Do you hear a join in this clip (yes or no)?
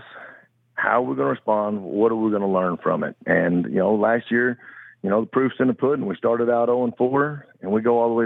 no